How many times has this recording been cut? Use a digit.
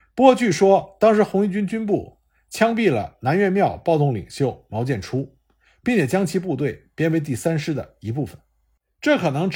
0